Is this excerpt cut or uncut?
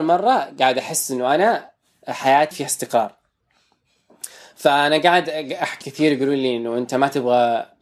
cut